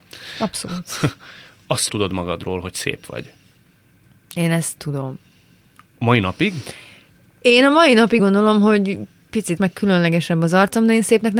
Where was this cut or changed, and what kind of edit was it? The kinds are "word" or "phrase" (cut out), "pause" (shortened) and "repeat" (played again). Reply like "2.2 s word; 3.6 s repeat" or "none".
1.9 s word; 4.8 s word; 8.2 s word; 9.6 s word